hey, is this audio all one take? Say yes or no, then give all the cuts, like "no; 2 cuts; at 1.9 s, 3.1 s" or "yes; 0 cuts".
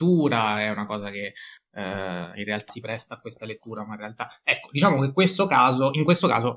no; 1 cut; at 2.7 s